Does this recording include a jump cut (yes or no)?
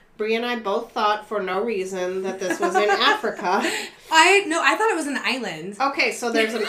no